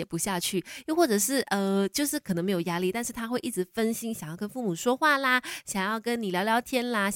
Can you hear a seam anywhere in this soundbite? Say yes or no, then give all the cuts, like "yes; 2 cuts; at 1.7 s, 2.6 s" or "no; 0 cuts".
no; 0 cuts